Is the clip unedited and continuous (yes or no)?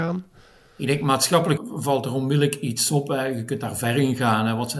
no